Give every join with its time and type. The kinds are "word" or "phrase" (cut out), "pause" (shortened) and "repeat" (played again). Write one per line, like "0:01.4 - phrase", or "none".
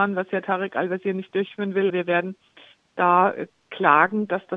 0:01.9 - word